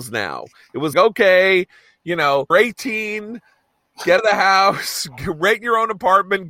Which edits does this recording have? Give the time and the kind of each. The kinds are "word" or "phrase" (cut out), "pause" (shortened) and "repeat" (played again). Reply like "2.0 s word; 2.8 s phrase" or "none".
0.9 s word; 2.5 s word; 4.2 s word